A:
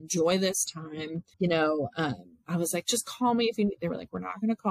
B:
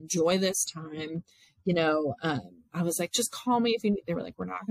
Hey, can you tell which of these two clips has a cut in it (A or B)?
A